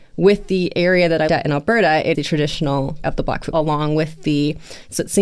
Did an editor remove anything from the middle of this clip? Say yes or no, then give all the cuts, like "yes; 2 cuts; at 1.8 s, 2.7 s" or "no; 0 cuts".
yes; 4 cuts; at 1.3 s, 2.1 s, 3.0 s, 3.5 s